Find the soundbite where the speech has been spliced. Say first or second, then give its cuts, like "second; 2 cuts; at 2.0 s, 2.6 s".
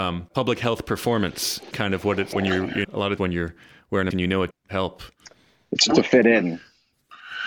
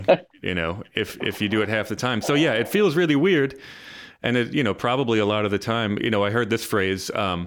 first; 7 cuts; at 1.7 s, 2.3 s, 2.8 s, 3.2 s, 4.1 s, 4.5 s, 5.9 s